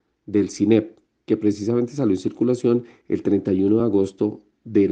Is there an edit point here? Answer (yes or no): no